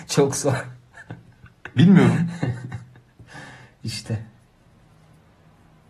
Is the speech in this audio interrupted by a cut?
no; 0 cuts

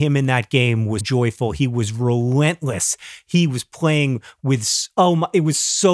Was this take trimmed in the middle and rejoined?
yes; 1 cut; at 1.0 s

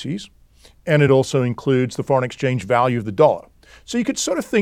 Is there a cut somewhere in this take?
no; 0 cuts

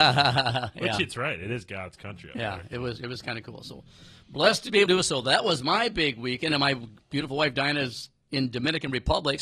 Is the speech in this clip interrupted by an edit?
yes; 1 cut; at 4.9 s

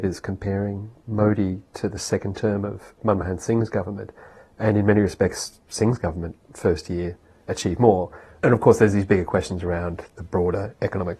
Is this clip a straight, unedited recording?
yes; 0 cuts

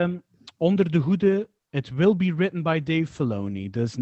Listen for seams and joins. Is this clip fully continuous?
yes; 0 cuts

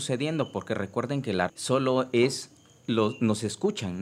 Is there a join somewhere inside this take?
yes; 1 cut; at 1.5 s

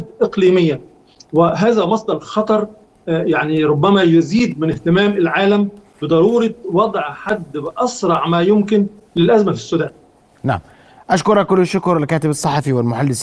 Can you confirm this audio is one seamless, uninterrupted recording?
yes; 0 cuts

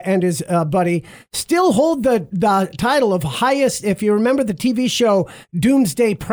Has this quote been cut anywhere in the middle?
no; 0 cuts

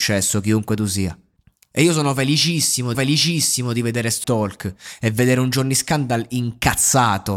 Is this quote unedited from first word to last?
no; 3 cuts; at 1.4 s, 2.9 s, 4.2 s

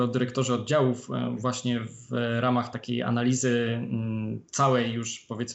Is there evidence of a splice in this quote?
no; 0 cuts

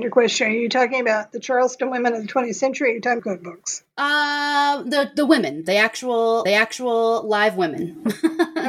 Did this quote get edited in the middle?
yes; 2 cuts; at 3.2 s, 6.5 s

